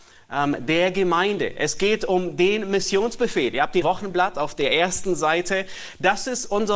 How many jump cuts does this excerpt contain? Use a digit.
1